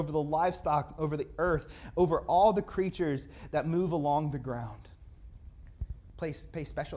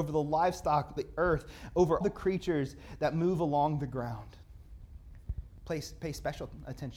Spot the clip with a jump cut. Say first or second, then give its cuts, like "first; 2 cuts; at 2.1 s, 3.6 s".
second; 2 cuts; at 1.0 s, 2.0 s